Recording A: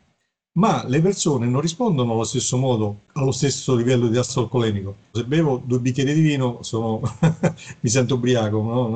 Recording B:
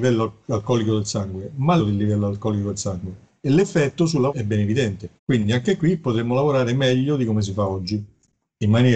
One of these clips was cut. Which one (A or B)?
B